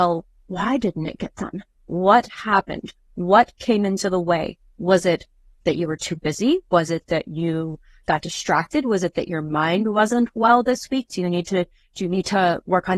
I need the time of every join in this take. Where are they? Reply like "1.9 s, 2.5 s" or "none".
none